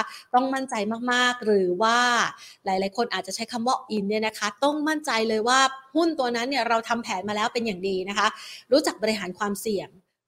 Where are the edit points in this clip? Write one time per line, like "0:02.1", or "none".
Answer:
0:03.9